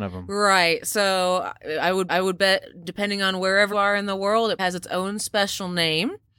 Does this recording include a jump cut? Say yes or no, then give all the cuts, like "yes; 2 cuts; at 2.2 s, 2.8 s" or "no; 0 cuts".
yes; 3 cuts; at 2.1 s, 3.7 s, 4.6 s